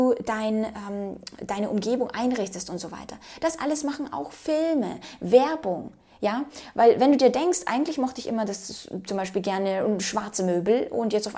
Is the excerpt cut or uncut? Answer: uncut